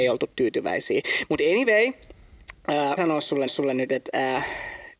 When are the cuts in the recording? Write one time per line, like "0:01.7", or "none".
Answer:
0:03.0
0:03.5